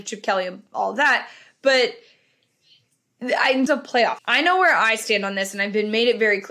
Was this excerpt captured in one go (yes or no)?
no